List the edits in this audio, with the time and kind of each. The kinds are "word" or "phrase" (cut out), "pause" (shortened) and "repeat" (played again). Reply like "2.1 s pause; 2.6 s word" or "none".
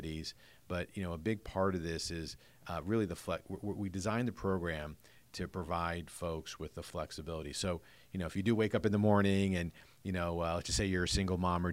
none